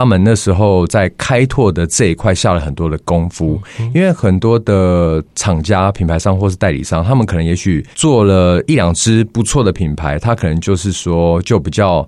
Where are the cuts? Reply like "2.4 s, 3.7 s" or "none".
7.9 s